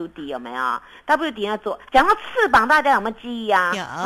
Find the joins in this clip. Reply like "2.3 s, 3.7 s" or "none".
1.9 s